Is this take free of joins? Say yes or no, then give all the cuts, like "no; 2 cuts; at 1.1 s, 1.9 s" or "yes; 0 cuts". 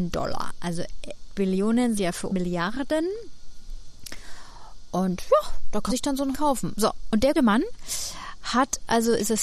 no; 6 cuts; at 1.3 s, 2.0 s, 2.3 s, 5.9 s, 6.3 s, 7.3 s